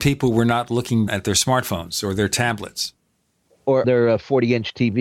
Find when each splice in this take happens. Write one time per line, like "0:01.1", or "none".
0:01.1
0:03.8